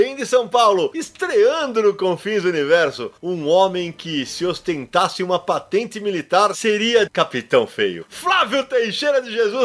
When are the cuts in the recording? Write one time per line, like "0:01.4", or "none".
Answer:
0:03.2
0:07.1